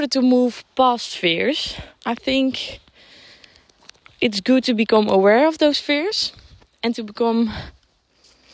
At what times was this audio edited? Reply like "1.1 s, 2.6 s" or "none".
none